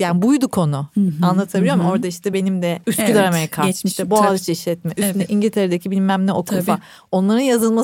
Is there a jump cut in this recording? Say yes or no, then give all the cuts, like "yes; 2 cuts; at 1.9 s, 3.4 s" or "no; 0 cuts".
no; 0 cuts